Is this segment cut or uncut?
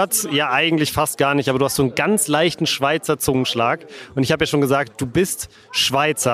uncut